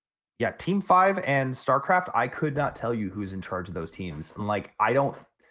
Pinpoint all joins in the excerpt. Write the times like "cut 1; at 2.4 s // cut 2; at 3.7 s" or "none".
none